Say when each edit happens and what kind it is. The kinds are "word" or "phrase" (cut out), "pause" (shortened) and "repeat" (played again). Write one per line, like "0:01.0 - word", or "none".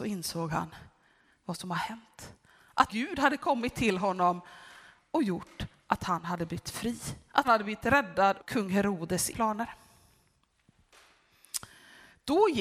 0:02.9 - word
0:07.4 - word
0:08.4 - word
0:09.3 - word